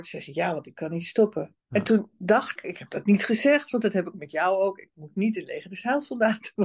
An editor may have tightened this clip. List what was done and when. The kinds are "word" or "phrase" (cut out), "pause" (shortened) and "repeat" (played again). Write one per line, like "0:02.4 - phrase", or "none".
0:01.6 - pause
0:02.6 - word
0:04.1 - word

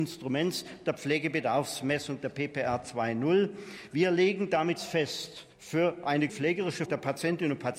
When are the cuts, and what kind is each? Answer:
0:04.8 - word
0:05.5 - pause
0:06.3 - word
0:06.9 - word

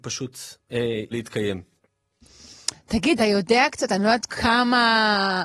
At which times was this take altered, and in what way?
0:01.1 - word
0:03.2 - word
0:04.3 - word

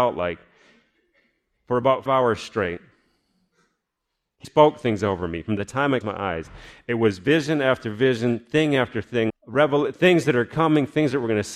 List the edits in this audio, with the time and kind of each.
0:02.1 - word
0:04.4 - word
0:06.0 - word
0:09.3 - word

